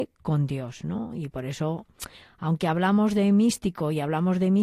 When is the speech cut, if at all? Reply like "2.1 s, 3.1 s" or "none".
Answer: none